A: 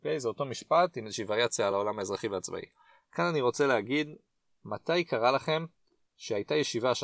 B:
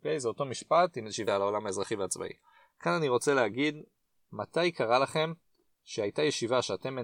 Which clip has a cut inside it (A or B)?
B